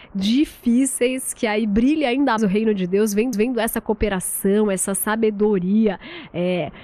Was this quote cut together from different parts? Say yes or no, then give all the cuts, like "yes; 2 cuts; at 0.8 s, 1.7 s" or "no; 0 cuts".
yes; 2 cuts; at 2.4 s, 3.3 s